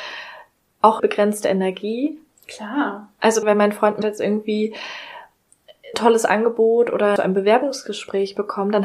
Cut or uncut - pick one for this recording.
cut